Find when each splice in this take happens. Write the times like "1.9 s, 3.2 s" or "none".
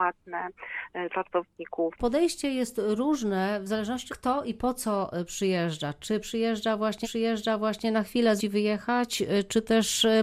1.1 s, 4.1 s, 7.0 s, 8.4 s